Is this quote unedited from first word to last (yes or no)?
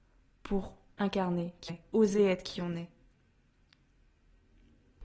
no